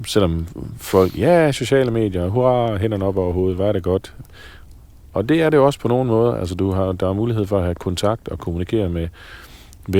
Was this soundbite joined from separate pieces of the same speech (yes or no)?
no